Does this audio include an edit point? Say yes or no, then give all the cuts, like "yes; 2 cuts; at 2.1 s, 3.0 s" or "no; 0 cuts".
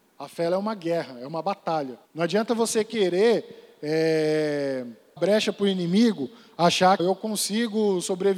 yes; 3 cuts; at 2.0 s, 5.2 s, 7.0 s